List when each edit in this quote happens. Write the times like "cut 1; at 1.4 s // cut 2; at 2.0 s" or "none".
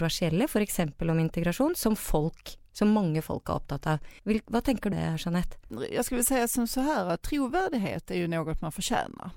cut 1; at 4.2 s // cut 2; at 4.9 s